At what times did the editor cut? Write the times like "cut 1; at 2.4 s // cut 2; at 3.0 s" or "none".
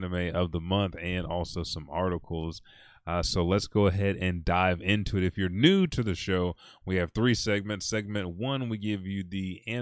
none